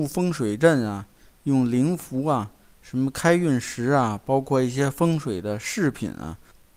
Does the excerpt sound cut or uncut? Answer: uncut